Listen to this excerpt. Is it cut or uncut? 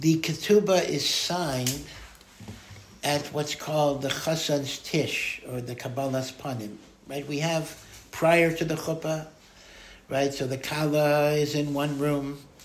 uncut